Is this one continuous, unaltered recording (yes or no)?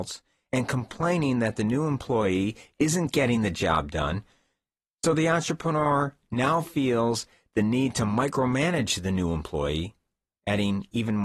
yes